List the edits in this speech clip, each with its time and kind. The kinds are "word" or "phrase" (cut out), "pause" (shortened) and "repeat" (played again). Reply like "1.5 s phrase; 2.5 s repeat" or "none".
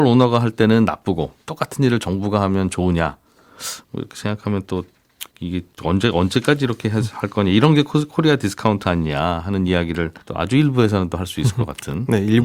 5.3 s pause; 10.2 s pause